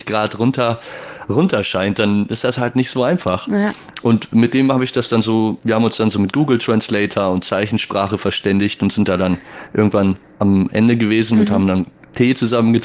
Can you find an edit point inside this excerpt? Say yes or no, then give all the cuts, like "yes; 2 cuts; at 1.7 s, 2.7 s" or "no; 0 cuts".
no; 0 cuts